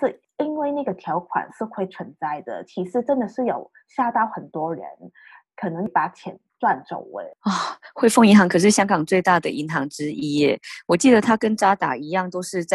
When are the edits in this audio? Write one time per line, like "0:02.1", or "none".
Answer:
none